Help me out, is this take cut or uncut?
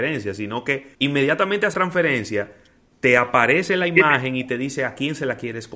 cut